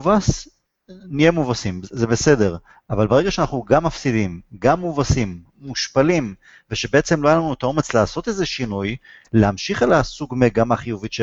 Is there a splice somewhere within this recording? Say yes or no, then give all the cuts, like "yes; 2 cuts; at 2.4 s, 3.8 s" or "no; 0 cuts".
no; 0 cuts